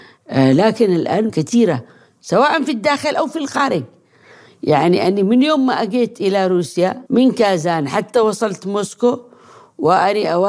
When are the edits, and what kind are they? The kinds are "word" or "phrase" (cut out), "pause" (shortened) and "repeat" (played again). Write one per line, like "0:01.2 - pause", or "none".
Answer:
0:01.3 - word
0:07.1 - pause